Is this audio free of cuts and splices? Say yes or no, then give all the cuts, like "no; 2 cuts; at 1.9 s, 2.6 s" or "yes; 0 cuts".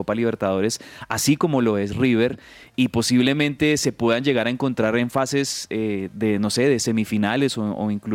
yes; 0 cuts